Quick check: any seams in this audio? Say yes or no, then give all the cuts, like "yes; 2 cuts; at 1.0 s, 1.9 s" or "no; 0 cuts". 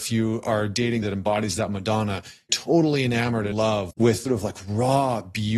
yes; 5 cuts; at 1.0 s, 2.5 s, 3.5 s, 3.9 s, 4.2 s